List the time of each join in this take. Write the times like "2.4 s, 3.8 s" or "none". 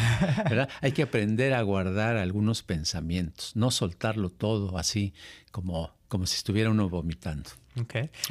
6.0 s

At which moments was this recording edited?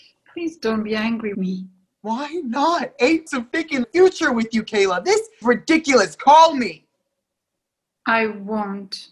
1.3 s, 3.3 s, 3.8 s, 5.4 s

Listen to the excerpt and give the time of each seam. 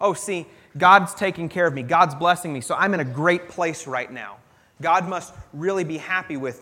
none

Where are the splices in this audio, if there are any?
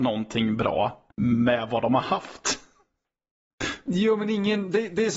1.1 s

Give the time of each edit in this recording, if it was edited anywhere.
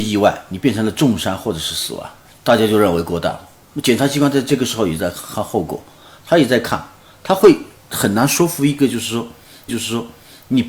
9.7 s

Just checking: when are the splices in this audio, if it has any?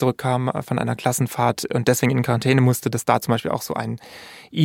none

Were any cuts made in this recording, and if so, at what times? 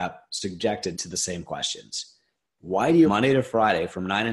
0.9 s, 3.0 s

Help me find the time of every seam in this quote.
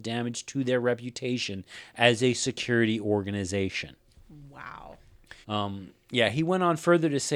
5.4 s

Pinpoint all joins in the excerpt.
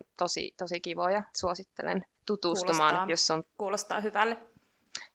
1.3 s, 2.2 s

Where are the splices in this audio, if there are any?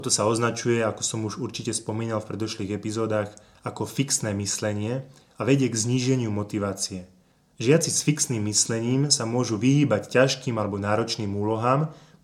none

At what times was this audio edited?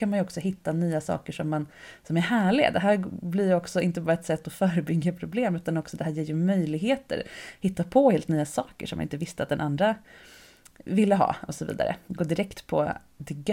none

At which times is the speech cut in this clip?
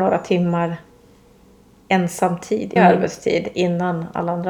2.8 s

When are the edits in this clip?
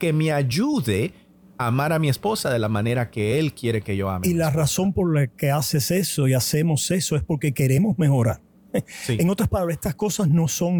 none

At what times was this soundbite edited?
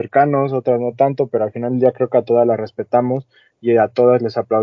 none

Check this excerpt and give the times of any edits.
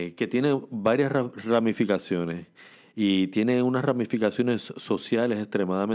none

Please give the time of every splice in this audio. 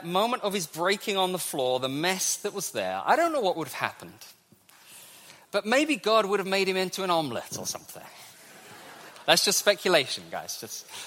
none

